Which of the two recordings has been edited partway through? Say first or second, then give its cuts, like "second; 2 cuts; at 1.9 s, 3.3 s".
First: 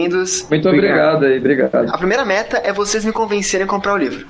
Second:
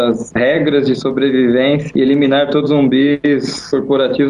second; 2 cuts; at 1.9 s, 2.7 s